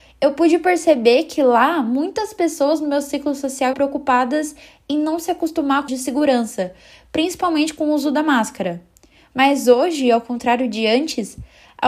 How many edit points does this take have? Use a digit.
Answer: 2